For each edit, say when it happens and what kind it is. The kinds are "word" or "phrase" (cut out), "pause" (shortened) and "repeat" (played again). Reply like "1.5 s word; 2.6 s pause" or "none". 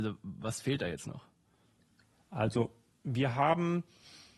none